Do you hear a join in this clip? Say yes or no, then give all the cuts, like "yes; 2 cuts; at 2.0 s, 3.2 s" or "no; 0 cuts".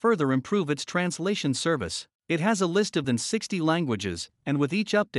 yes; 2 cuts; at 2.2 s, 3.0 s